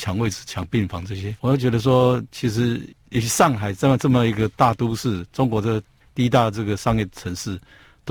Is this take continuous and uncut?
no; 1 cut; at 1.4 s

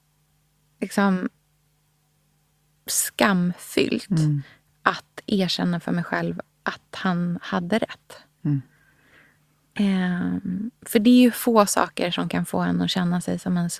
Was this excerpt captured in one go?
yes; 0 cuts

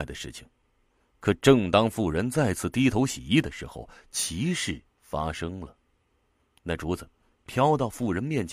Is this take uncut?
no; 1 cut; at 4.9 s

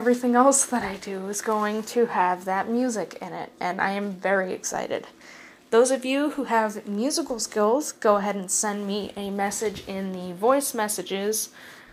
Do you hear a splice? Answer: no; 0 cuts

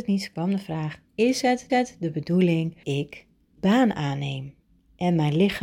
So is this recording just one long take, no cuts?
no; 3 cuts; at 1.7 s, 2.8 s, 3.6 s

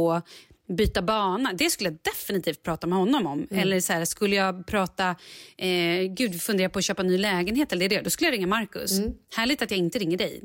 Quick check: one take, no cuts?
no; 1 cut; at 9.2 s

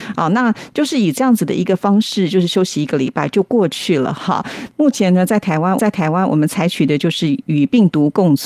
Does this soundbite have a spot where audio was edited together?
yes; 1 cut; at 5.8 s

